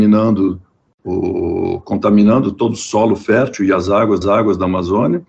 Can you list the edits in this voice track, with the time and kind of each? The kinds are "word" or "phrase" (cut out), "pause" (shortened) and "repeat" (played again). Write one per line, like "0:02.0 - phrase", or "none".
0:04.2 - repeat